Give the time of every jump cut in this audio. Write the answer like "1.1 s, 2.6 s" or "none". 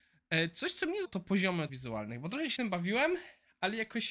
1.0 s, 1.7 s, 2.6 s